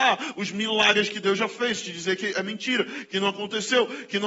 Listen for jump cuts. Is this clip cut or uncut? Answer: uncut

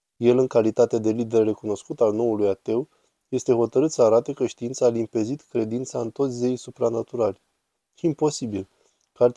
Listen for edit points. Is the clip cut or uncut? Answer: uncut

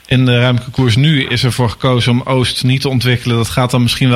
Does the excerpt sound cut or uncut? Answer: uncut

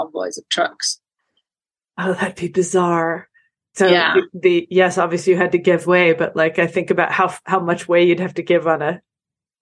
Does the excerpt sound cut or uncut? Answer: cut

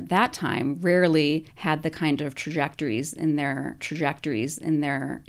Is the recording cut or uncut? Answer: cut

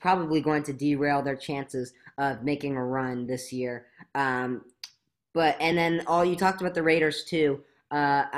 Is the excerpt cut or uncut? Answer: uncut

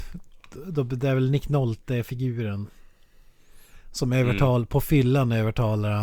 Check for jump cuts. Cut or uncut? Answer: uncut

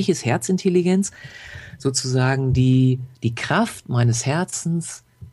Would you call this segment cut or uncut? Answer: cut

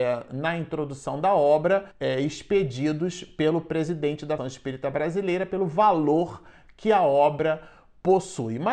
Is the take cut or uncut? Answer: cut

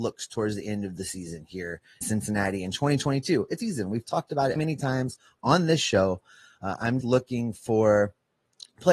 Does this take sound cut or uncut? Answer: cut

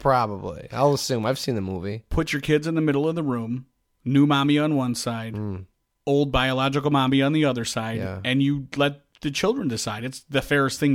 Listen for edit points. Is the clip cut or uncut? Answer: uncut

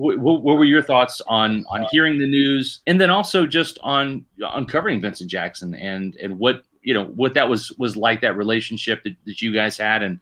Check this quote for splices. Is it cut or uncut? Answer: cut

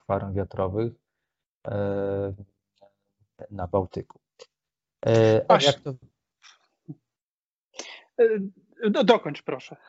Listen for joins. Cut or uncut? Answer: cut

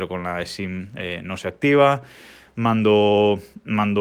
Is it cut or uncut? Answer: uncut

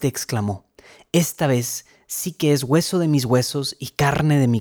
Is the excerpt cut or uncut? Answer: uncut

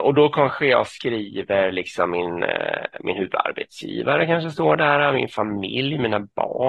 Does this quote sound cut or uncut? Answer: uncut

